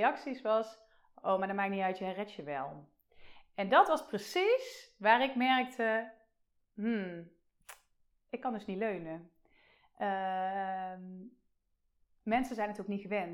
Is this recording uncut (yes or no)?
yes